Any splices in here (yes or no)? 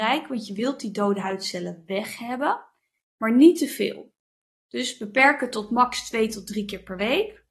no